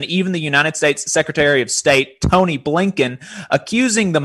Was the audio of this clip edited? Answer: no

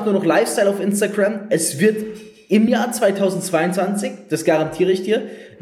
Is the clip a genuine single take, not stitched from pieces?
yes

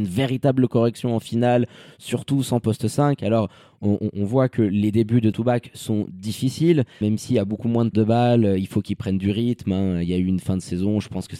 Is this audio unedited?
no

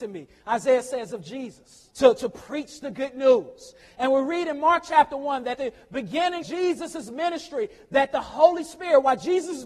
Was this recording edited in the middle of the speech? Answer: yes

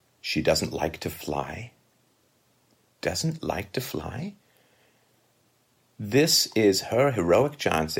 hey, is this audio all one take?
yes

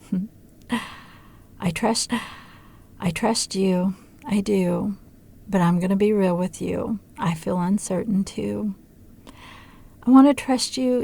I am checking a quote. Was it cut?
yes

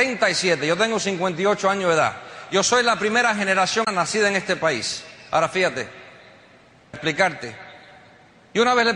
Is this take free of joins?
no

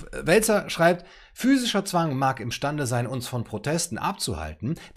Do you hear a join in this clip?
no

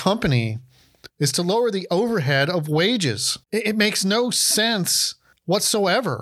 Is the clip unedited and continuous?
no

